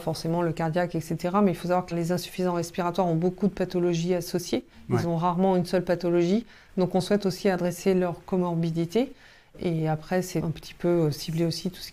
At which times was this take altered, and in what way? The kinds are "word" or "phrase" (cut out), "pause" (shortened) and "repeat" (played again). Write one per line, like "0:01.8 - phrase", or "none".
none